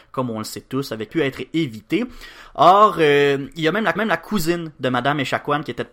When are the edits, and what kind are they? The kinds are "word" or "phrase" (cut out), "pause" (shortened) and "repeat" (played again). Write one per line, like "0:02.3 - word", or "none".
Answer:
0:01.1 - phrase
0:04.0 - repeat